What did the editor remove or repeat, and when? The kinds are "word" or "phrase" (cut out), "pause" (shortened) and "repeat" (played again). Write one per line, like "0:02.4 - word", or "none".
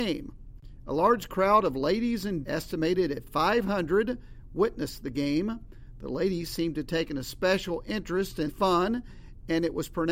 0:02.4 - word
0:08.5 - word